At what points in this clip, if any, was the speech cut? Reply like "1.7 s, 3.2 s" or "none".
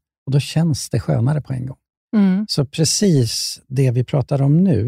none